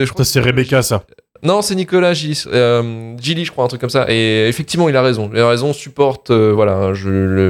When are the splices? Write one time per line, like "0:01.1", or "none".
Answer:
none